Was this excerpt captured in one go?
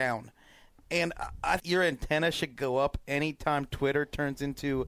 no; 1 cut; at 1.6 s

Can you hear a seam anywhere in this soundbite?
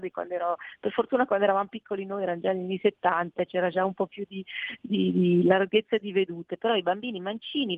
no; 0 cuts

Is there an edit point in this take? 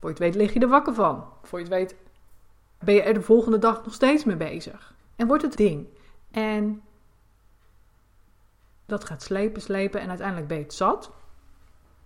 yes; 3 cuts; at 2.8 s, 5.0 s, 5.5 s

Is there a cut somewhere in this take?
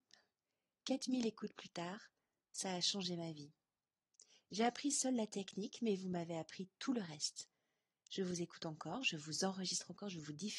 no; 0 cuts

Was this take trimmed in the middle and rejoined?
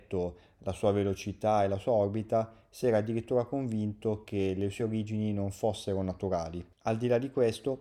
no; 0 cuts

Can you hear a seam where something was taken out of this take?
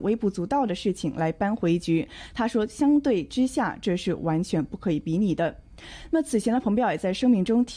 no; 0 cuts

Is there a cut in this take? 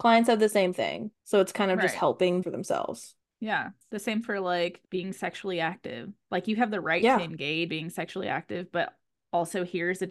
yes; 6 cuts; at 1.2 s, 2.4 s, 3.2 s, 4.2 s, 4.8 s, 7.7 s

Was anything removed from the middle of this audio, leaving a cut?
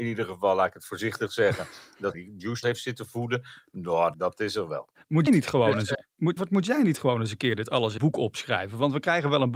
yes; 7 cuts; at 2.1 s, 2.6 s, 4.1 s, 5.3 s, 5.9 s, 6.4 s, 8.0 s

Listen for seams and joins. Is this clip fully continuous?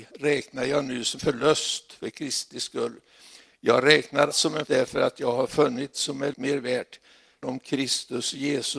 no; 6 cuts; at 1.2 s, 4.3 s, 4.7 s, 5.9 s, 6.3 s, 7.4 s

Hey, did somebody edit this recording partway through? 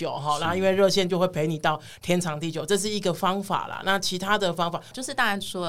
no; 0 cuts

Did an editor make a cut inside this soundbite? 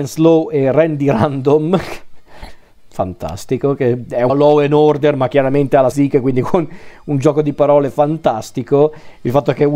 yes; 2 cuts; at 4.3 s, 5.9 s

